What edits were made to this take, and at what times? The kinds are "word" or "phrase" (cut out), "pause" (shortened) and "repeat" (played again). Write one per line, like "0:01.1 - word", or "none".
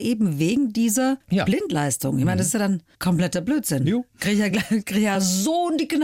none